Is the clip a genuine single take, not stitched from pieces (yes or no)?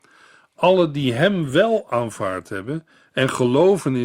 yes